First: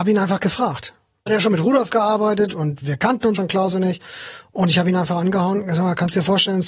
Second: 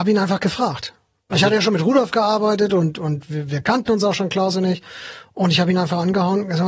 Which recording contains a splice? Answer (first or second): first